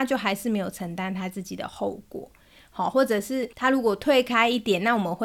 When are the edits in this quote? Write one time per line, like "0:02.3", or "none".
0:03.5

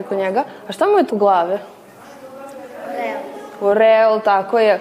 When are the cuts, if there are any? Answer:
0:01.1

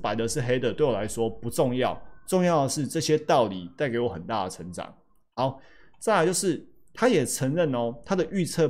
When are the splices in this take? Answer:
none

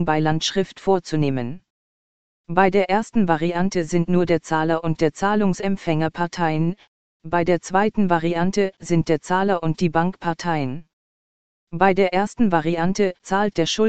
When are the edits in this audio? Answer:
none

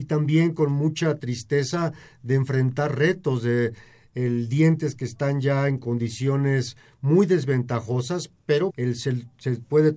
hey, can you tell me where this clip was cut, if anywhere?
0:08.7

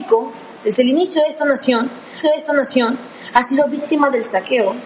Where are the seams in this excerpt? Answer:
0:02.2

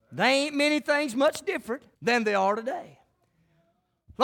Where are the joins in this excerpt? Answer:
0:01.9

